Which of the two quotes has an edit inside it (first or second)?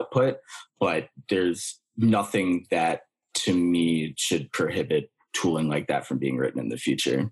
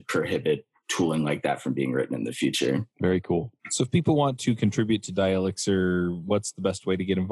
second